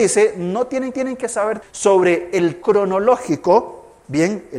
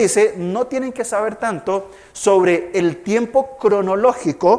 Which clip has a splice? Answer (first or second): first